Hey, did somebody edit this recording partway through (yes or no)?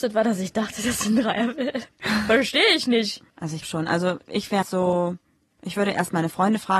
yes